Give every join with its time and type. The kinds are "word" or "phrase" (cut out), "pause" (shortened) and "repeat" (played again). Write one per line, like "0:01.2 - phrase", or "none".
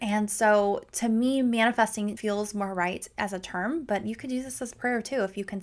0:02.2 - word

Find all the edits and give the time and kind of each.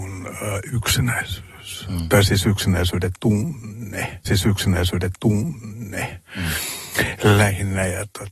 0:04.3 - repeat

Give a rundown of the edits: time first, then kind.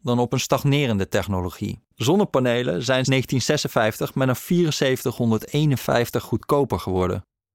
0:01.8 - pause
0:03.1 - word
0:04.4 - word

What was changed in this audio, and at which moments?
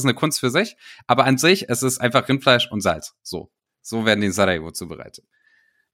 none

